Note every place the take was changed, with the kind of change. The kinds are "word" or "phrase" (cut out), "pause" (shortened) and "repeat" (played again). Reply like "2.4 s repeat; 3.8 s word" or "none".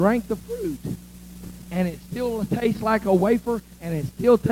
none